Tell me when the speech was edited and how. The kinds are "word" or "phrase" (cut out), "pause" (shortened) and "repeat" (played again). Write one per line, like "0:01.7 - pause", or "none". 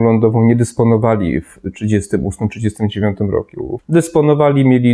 0:03.8 - word